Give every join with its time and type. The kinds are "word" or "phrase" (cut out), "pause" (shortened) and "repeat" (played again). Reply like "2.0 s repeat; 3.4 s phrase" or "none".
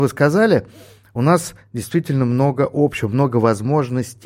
none

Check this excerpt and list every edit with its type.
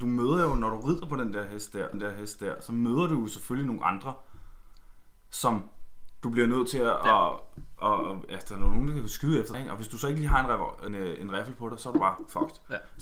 1.9 s repeat; 9.5 s word; 10.9 s word

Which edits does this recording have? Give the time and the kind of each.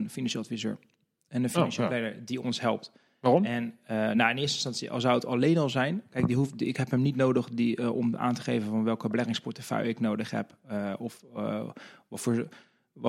none

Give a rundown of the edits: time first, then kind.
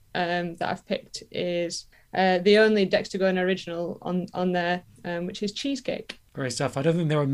1.9 s pause

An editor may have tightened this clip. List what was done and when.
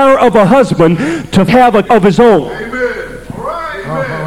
1.5 s word; 1.8 s word

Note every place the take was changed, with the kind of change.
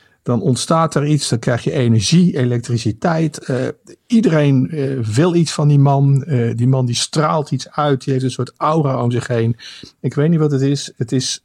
none

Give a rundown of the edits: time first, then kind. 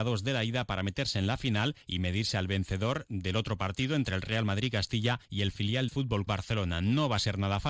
1.8 s pause; 5.2 s pause; 5.9 s word; 6.3 s word

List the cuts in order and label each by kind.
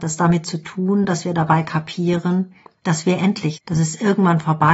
3.5 s word

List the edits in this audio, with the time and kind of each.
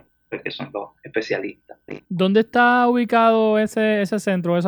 2.0 s pause

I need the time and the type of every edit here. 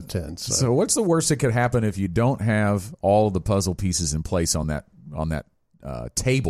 none

